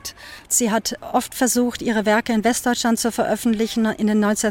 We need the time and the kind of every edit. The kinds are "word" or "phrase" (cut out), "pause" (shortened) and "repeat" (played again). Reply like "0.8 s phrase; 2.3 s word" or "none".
none